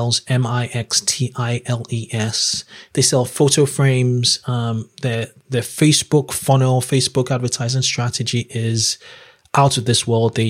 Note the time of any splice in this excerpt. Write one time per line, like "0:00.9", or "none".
none

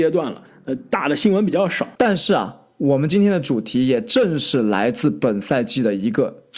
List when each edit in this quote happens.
0:01.9

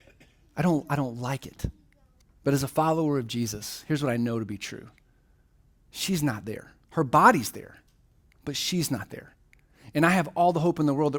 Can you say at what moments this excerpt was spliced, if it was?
0:02.2
0:06.8

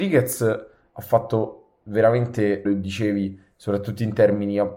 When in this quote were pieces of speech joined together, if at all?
0:02.7

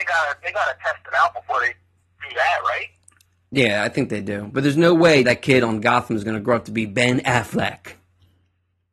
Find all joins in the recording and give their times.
0:05.2

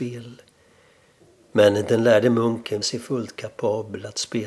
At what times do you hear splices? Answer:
0:02.8

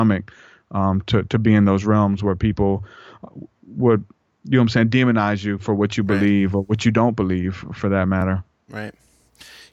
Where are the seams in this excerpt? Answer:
none

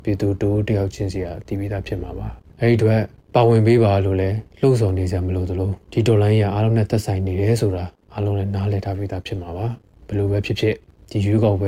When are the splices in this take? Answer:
0:04.5
0:05.8

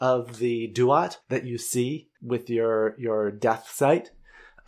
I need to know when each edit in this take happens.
0:01.2
0:02.1

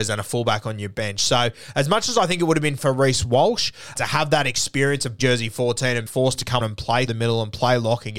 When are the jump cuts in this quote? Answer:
0:02.8
0:04.0
0:05.2
0:06.1
0:06.6
0:07.1

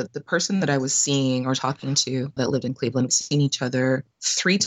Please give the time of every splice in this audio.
0:02.4
0:03.1

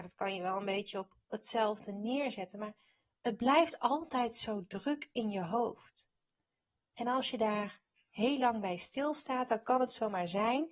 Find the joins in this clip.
none

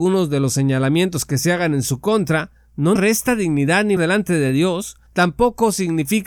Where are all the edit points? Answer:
0:03.0
0:04.0
0:05.1

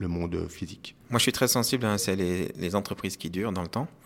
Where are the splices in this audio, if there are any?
0:02.0

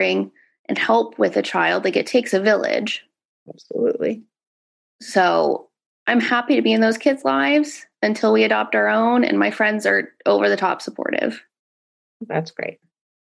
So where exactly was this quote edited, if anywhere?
none

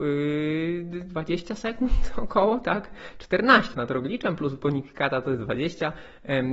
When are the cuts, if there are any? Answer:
0:03.7

